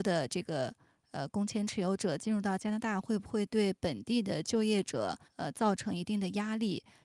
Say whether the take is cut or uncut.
cut